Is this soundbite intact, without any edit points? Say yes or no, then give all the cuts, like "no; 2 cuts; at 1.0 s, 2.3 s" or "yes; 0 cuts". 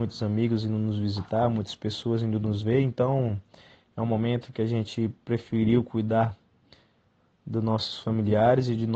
yes; 0 cuts